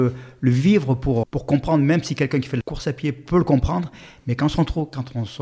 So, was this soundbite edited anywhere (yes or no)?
yes